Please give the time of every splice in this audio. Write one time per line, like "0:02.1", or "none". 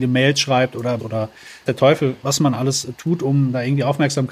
0:01.0
0:01.7
0:02.2